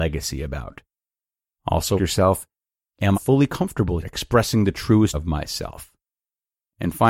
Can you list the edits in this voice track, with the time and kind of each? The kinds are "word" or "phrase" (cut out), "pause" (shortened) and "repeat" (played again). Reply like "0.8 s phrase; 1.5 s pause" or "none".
2.0 s word; 3.1 s word; 4.0 s word; 5.1 s word